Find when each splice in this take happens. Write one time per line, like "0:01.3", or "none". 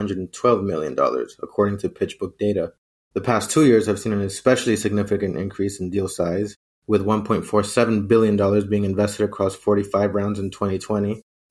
none